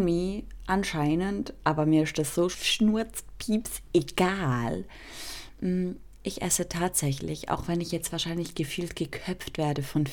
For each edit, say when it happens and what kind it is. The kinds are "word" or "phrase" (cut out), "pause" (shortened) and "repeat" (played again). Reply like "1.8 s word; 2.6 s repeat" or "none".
none